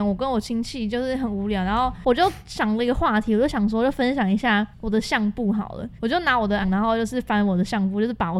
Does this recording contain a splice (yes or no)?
yes